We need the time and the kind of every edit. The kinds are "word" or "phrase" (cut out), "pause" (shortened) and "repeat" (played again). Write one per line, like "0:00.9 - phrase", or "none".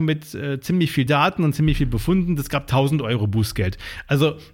none